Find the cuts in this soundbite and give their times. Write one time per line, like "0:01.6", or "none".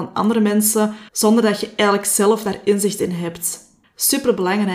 0:01.1
0:03.8